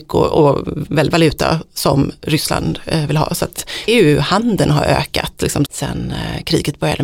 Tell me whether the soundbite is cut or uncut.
cut